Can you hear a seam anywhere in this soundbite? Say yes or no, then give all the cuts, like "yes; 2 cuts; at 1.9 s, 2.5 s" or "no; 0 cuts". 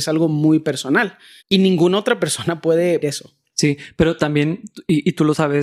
yes; 2 cuts; at 1.4 s, 3.0 s